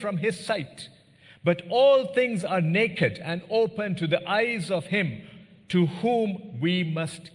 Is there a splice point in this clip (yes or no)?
no